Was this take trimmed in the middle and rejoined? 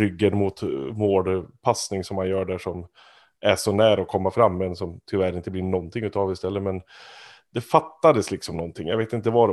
no; 0 cuts

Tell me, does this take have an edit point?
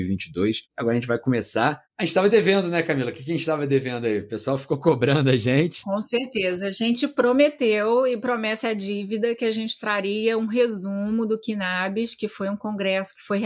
no; 0 cuts

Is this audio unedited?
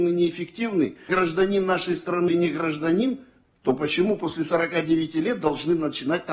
no; 2 cuts; at 1.1 s, 2.3 s

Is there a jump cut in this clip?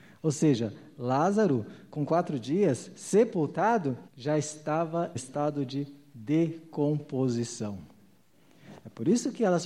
yes; 2 cuts; at 4.1 s, 5.2 s

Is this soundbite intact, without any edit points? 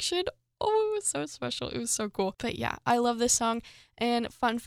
yes; 0 cuts

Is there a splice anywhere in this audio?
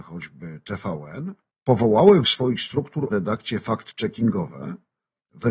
yes; 3 cuts; at 1.5 s, 2.2 s, 3.1 s

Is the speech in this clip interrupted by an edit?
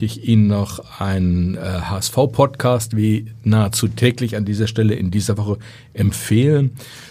no; 0 cuts

